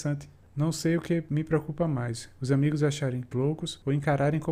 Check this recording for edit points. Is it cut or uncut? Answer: cut